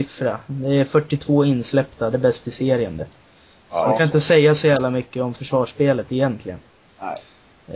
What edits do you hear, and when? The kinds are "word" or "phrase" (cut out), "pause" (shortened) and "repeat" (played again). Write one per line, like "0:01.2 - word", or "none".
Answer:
0:02.1 - phrase

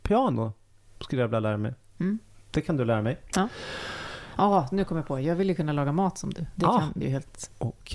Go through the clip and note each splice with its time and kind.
0:07.0 - word

